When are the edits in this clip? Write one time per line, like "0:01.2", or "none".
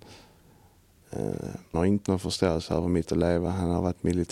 0:01.7
0:02.1
0:03.0